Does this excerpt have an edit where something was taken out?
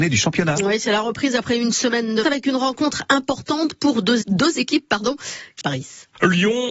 yes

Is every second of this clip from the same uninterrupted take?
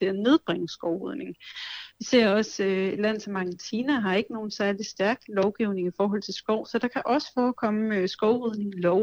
yes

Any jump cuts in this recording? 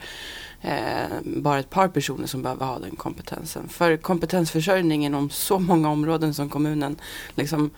no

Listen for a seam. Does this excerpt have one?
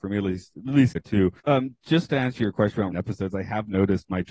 yes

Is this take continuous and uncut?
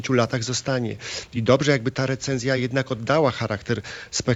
yes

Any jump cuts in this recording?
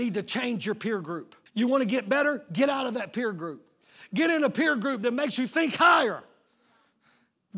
yes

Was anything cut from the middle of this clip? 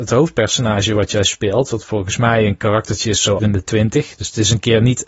yes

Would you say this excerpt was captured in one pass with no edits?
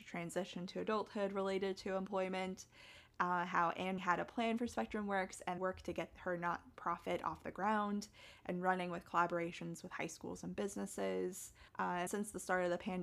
no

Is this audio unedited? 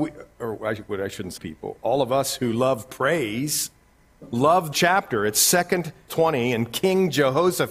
no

